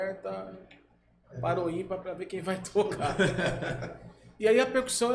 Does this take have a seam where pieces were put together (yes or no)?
no